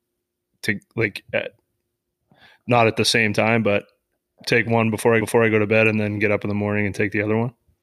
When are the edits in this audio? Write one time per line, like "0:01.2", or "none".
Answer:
0:05.2